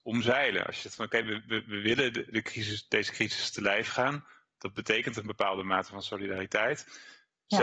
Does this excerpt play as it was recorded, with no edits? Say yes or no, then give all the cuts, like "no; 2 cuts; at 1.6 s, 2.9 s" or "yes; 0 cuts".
yes; 0 cuts